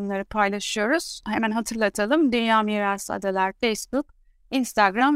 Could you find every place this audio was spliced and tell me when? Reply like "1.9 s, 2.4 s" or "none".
none